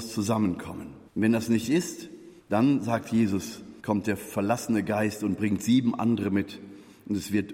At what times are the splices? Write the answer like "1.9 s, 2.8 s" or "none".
1.1 s, 2.4 s, 3.8 s